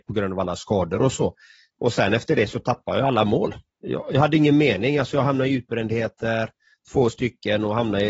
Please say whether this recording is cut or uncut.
uncut